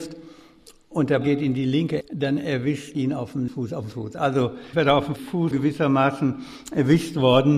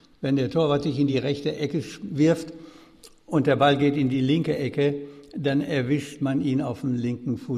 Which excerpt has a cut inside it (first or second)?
first